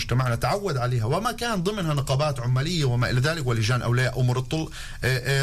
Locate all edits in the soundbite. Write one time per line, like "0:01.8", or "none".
none